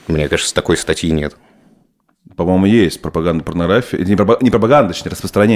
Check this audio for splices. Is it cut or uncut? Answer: uncut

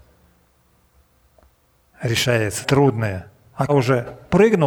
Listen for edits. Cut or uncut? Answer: cut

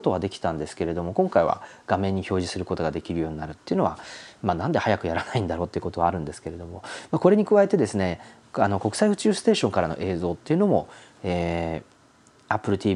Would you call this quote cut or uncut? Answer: uncut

